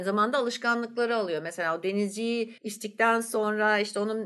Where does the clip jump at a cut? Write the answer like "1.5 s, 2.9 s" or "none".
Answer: 2.6 s